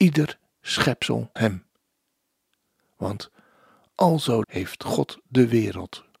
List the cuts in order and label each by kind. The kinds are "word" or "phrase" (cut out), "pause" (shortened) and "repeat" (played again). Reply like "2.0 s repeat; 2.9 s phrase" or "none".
1.4 s word; 4.4 s word

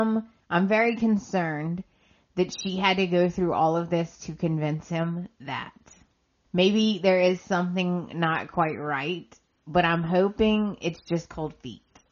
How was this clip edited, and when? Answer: none

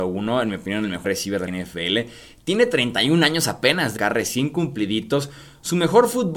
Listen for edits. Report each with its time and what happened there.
1.0 s word; 1.5 s word; 4.0 s word

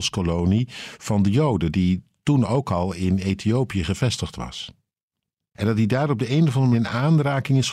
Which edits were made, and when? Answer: 6.7 s word

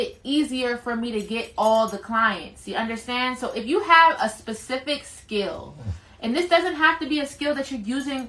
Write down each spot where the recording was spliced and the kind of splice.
none

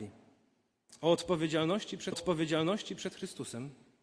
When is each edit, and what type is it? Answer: 2.1 s repeat

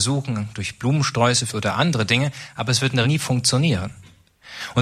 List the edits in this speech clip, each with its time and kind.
1.5 s word; 3.0 s word

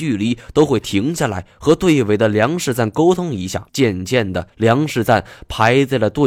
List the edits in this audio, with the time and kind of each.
3.7 s pause; 4.5 s pause

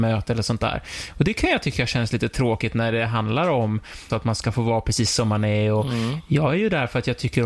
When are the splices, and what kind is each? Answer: 4.1 s word

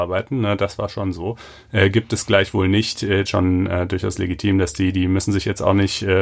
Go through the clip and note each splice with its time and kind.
3.3 s phrase

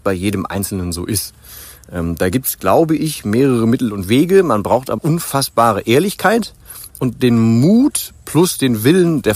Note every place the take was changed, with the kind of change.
5.0 s word

